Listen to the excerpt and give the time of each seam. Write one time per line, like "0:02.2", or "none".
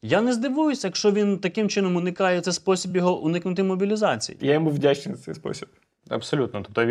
none